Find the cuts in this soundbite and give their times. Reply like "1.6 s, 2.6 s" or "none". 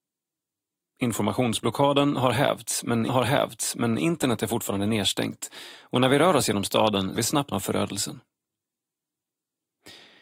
3.1 s, 7.2 s, 7.5 s